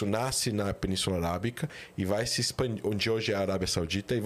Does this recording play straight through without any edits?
yes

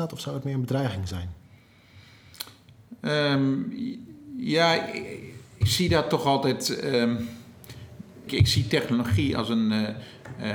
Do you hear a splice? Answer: yes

